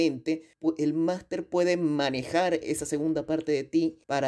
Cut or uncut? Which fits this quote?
uncut